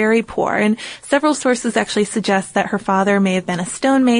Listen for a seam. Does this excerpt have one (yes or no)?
no